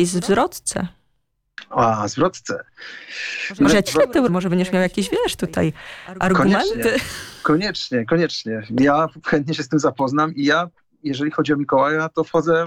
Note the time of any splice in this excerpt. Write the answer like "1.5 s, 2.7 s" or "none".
3.9 s, 4.3 s, 9.2 s